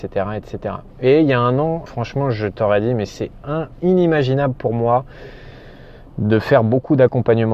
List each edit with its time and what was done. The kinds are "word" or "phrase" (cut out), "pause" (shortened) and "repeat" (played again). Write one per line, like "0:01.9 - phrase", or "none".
0:01.9 - word
0:03.7 - pause

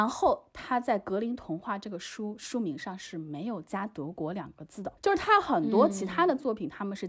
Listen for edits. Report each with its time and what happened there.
0:05.0 - pause

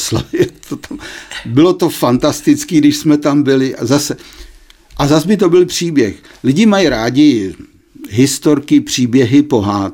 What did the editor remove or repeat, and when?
none

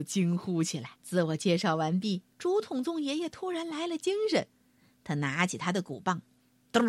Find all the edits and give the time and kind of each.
0:01.0 - pause
0:02.3 - pause

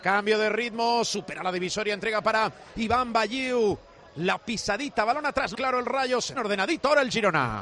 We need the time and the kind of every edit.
0:05.5 - phrase
0:06.3 - phrase

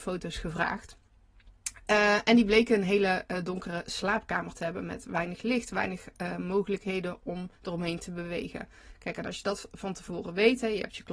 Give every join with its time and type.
0:07.6 - pause

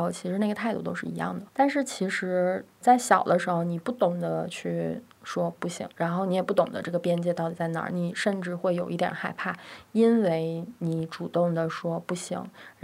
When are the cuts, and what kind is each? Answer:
0:01.5 - pause
0:05.9 - pause

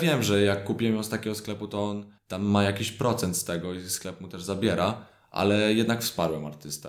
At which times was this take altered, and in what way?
0:02.2 - pause

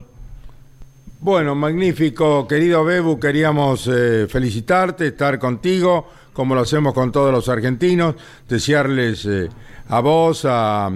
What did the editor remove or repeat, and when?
none

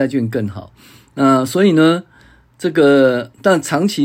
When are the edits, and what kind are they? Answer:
none

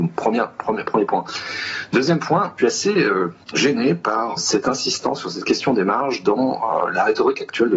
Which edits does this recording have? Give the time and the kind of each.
0:02.6 - phrase
0:03.4 - pause
0:04.4 - word

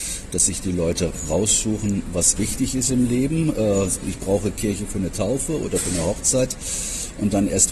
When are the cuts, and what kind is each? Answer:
0:02.4 - word

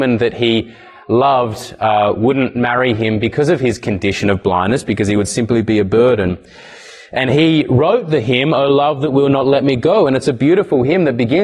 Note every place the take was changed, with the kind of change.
none

